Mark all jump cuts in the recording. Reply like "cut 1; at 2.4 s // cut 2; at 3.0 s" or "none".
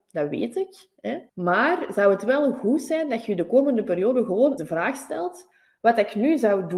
cut 1; at 1.3 s // cut 2; at 4.6 s

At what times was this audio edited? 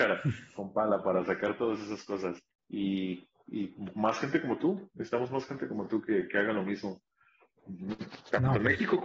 cut 1; at 2.5 s

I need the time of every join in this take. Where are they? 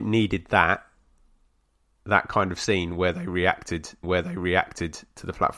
cut 1; at 4.0 s

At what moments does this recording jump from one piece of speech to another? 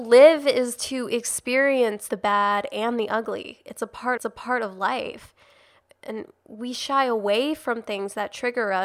cut 1; at 2.1 s // cut 2; at 4.2 s

